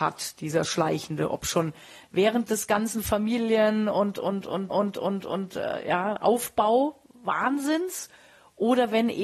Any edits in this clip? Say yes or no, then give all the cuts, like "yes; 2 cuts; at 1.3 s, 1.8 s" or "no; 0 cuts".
yes; 1 cut; at 4.7 s